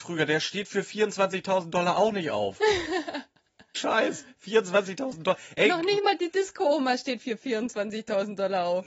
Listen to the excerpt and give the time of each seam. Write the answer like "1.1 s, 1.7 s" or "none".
3.7 s